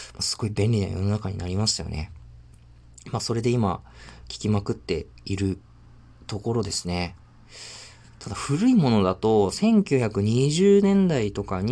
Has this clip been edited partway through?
no; 0 cuts

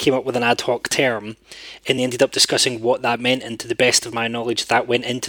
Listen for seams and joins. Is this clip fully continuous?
yes; 0 cuts

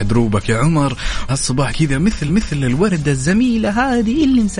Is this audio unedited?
no; 3 cuts; at 1.3 s, 1.7 s, 2.3 s

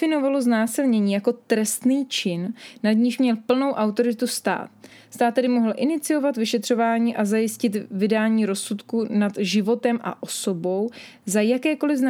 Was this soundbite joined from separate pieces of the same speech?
no; 0 cuts

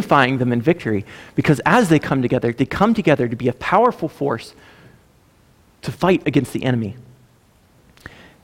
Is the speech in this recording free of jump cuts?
yes; 0 cuts

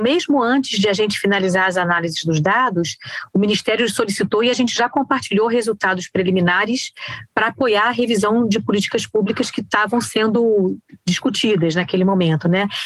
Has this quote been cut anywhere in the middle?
no; 0 cuts

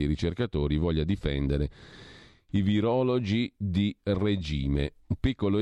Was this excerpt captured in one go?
yes; 0 cuts

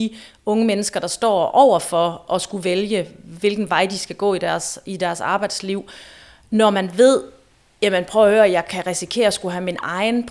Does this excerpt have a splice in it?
no; 0 cuts

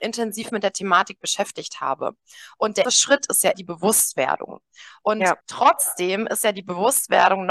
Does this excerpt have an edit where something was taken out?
yes; 3 cuts; at 2.8 s, 3.5 s, 5.4 s

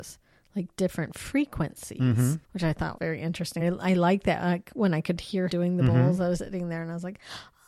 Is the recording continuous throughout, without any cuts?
no; 5 cuts; at 2.4 s, 3.0 s, 3.6 s, 5.5 s, 6.4 s

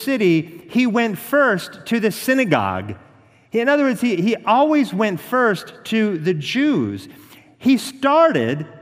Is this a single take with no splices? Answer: yes; 0 cuts

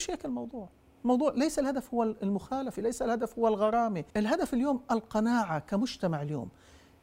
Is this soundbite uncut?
no; 1 cut; at 4.1 s

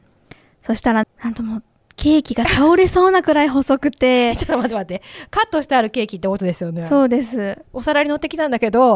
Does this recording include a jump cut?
yes; 1 cut; at 1.0 s

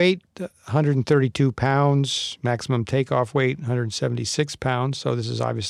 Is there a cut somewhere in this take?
no; 0 cuts

